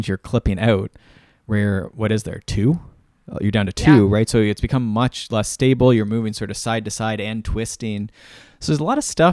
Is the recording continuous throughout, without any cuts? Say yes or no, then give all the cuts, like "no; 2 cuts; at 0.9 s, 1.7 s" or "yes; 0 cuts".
yes; 0 cuts